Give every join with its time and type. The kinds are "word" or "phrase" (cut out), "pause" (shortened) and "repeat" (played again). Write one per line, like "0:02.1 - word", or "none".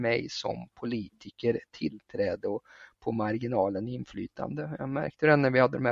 none